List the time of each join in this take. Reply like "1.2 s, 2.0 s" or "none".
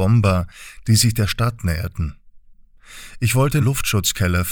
3.6 s